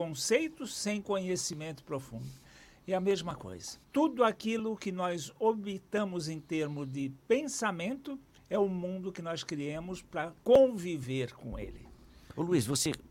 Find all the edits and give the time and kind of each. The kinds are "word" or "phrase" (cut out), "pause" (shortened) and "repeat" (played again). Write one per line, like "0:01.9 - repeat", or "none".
0:03.8 - pause
0:10.4 - pause